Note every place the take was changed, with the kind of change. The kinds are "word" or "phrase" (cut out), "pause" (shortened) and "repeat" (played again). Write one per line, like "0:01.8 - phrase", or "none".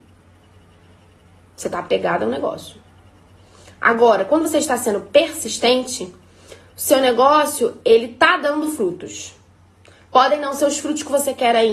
none